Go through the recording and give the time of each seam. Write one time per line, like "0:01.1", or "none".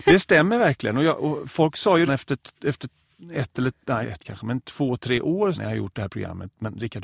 0:02.1
0:04.0
0:05.5